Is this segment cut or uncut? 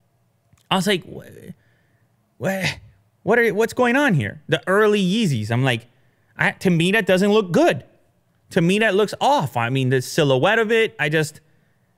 uncut